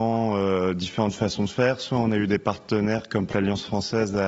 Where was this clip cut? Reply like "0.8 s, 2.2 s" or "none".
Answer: 3.3 s